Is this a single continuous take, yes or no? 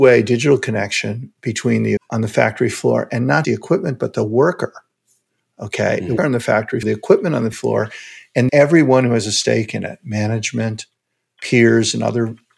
no